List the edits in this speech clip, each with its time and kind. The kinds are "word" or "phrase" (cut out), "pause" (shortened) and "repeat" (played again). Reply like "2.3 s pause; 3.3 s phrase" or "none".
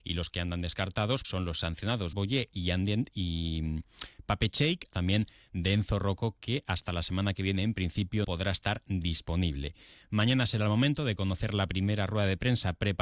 1.2 s word; 2.1 s word; 4.9 s word; 8.2 s word